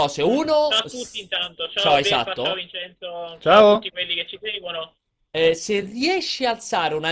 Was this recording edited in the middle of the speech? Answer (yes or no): no